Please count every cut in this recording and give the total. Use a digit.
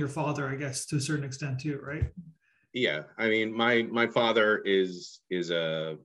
0